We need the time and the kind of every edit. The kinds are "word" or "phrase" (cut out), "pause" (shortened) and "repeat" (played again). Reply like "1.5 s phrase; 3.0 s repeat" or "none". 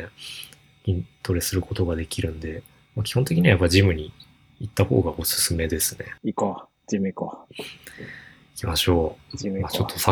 none